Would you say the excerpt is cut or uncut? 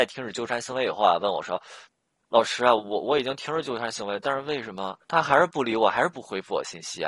cut